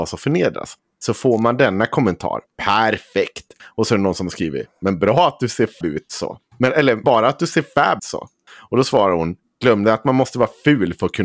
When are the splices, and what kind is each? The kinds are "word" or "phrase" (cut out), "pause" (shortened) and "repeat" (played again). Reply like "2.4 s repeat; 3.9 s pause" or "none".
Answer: 5.8 s word; 7.0 s word; 8.0 s word